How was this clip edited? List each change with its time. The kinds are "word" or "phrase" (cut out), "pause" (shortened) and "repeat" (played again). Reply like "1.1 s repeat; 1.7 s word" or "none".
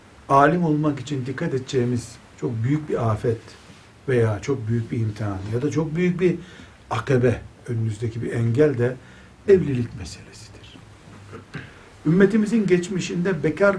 none